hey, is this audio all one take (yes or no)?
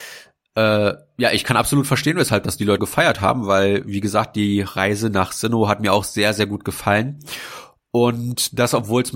no